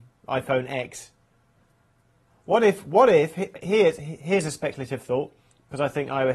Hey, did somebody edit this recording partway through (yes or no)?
no